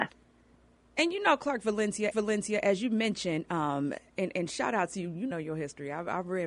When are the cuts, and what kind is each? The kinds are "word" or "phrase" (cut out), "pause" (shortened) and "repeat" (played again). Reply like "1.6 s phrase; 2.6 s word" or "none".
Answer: 2.1 s repeat; 5.3 s phrase